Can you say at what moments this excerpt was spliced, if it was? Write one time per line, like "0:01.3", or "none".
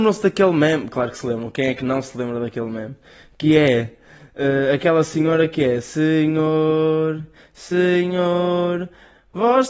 none